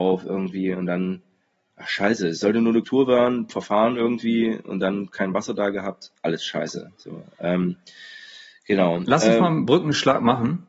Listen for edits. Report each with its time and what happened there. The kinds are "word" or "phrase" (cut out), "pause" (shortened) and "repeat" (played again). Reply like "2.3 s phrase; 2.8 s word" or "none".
2.8 s word; 3.5 s word